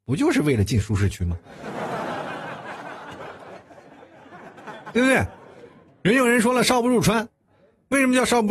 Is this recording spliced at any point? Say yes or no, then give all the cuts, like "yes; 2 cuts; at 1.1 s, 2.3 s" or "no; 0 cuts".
no; 0 cuts